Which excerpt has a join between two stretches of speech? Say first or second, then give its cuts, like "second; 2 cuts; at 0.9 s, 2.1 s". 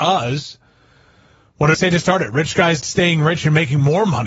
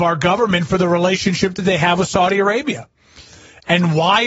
first; 2 cuts; at 1.7 s, 2.8 s